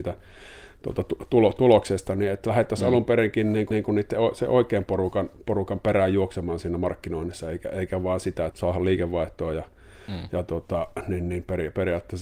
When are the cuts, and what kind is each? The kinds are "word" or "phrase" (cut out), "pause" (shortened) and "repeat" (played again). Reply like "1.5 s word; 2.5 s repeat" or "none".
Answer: 3.7 s repeat; 8.5 s word